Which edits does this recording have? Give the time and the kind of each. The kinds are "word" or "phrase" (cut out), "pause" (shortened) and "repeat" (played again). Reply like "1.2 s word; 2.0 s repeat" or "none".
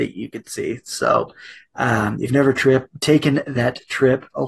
2.3 s word